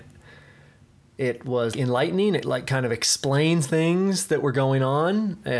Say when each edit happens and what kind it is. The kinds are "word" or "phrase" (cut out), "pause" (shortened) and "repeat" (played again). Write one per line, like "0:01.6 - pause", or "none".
0:01.7 - word
0:02.4 - word
0:03.6 - word